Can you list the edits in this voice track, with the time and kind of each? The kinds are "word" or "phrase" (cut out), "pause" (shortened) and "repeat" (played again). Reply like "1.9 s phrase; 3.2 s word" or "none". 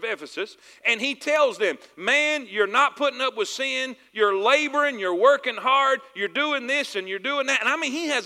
none

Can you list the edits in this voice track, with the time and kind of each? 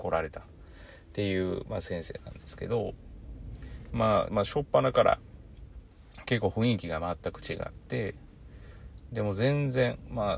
4.3 s phrase

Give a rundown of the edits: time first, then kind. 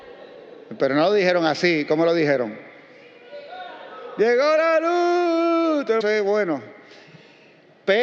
6.0 s phrase

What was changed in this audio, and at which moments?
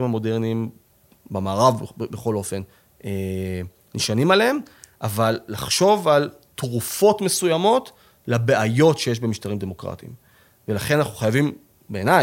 none

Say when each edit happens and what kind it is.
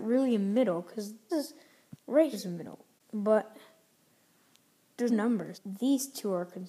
1.3 s word; 2.3 s word; 5.1 s word; 5.5 s word

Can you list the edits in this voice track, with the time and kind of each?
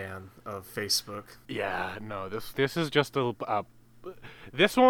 2.5 s word

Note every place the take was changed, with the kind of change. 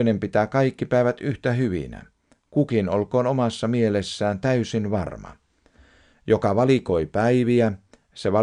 none

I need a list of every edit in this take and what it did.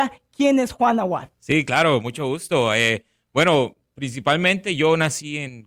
1.3 s pause

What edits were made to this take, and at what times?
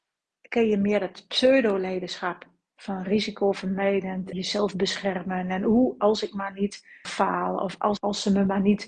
4.3 s word; 7.0 s word; 8.0 s word

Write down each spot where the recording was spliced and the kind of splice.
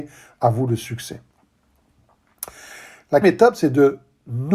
3.2 s word

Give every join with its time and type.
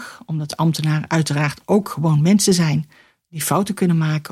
none

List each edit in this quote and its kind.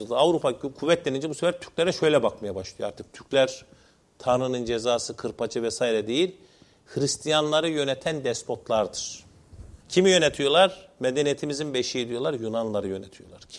9.8 s pause

